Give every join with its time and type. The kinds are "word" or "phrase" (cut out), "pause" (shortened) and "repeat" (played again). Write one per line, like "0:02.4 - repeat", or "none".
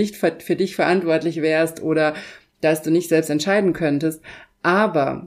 none